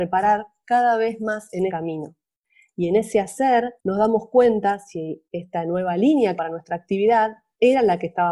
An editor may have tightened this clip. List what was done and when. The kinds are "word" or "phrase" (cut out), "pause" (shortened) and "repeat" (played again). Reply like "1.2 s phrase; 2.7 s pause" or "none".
1.7 s word; 3.8 s pause; 5.2 s pause; 6.4 s phrase